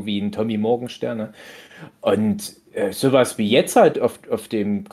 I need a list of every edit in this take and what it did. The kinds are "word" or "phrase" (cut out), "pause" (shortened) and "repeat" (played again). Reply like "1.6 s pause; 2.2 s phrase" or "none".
none